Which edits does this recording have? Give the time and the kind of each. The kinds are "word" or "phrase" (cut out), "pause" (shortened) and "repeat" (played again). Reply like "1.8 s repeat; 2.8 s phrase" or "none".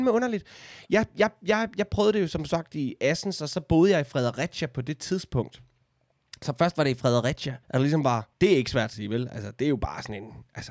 7.6 s pause; 8.3 s pause; 8.9 s phrase